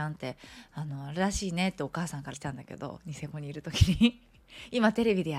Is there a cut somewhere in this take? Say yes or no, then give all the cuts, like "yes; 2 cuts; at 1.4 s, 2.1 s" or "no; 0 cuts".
yes; 1 cut; at 2.3 s